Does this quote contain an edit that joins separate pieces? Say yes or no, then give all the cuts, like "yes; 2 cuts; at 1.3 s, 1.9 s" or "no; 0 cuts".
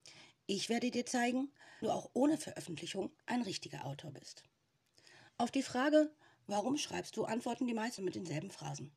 yes; 3 cuts; at 1.8 s, 3.2 s, 8.0 s